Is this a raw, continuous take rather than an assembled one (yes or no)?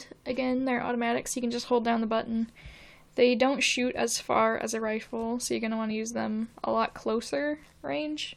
yes